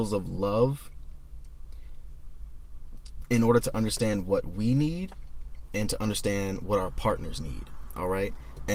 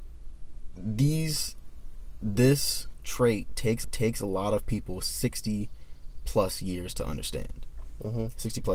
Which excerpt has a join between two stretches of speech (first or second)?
second